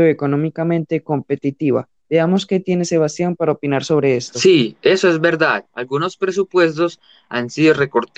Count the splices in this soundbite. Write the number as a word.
one